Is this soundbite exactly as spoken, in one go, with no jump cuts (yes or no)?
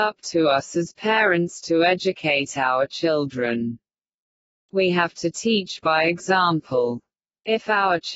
yes